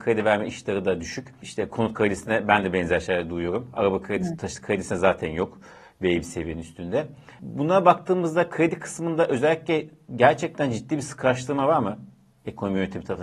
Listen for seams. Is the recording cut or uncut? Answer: uncut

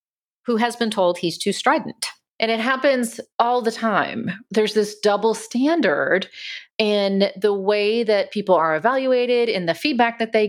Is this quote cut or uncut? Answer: uncut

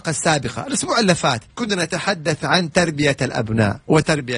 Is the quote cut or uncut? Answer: cut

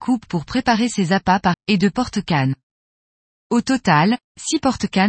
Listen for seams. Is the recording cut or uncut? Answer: cut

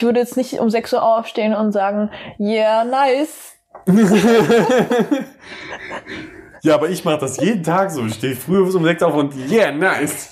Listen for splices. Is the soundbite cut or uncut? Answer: uncut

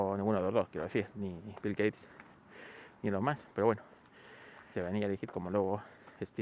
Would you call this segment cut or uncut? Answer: cut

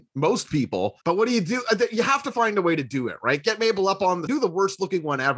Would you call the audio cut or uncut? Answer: cut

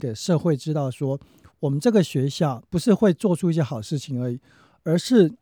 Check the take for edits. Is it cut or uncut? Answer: cut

